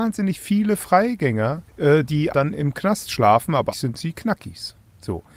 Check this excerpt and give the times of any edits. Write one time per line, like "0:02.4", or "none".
0:01.7
0:02.3
0:03.7